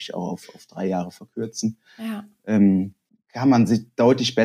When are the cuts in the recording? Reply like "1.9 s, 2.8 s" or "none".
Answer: 3.1 s